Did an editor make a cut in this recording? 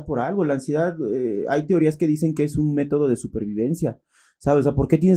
no; 0 cuts

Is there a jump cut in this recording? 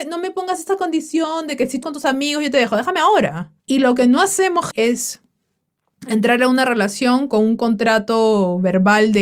yes; 3 cuts; at 1.8 s, 3.6 s, 4.7 s

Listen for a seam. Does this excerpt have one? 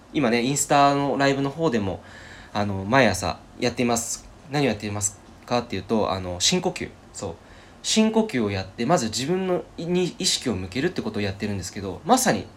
yes; 3 cuts; at 3.5 s, 7.0 s, 9.7 s

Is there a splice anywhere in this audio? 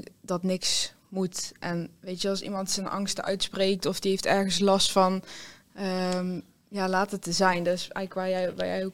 no; 0 cuts

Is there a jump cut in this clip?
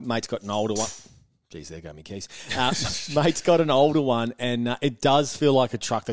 no; 0 cuts

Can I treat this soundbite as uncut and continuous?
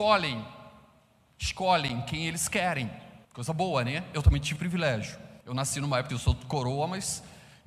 no; 4 cuts; at 3.2 s, 4.6 s, 5.4 s, 6.1 s

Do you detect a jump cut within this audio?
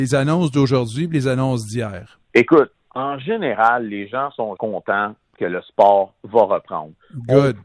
yes; 2 cuts; at 2.3 s, 4.6 s

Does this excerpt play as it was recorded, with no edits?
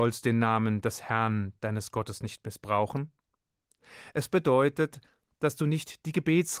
yes; 0 cuts

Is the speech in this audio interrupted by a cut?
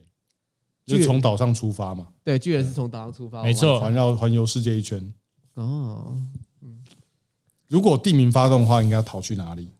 no; 0 cuts

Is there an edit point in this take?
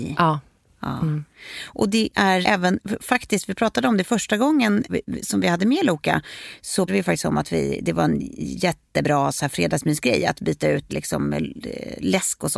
yes; 4 cuts; at 2.4 s, 4.9 s, 6.9 s, 10.9 s

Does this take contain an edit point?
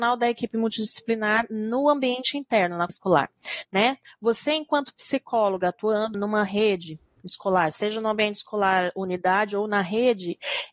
yes; 2 cuts; at 2.9 s, 6.1 s

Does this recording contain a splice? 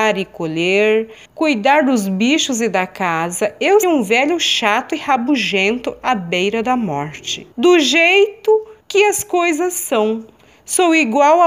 yes; 4 cuts; at 1.2 s, 3.8 s, 7.5 s, 8.8 s

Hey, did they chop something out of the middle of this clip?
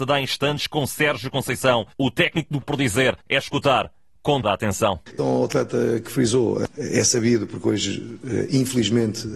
yes; 5 cuts; at 1.9 s, 2.6 s, 3.2 s, 4.4 s, 5.2 s

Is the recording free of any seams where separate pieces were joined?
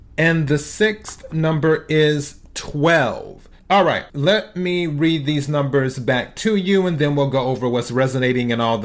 no; 2 cuts; at 3.6 s, 4.1 s

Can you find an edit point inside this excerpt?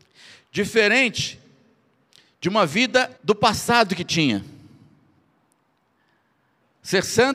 yes; 1 cut; at 3.2 s

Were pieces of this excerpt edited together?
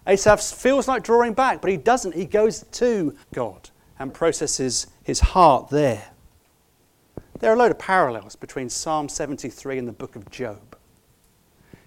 yes; 1 cut; at 3.2 s

